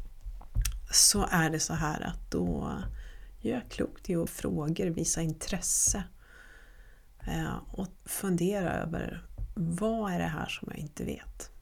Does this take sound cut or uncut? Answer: cut